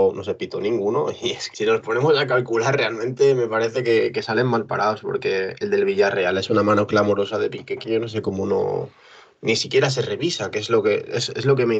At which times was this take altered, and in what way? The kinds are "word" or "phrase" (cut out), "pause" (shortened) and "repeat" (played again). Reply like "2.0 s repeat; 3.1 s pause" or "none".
1.5 s word